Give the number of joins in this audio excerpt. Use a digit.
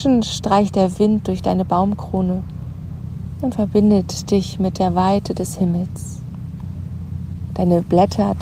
0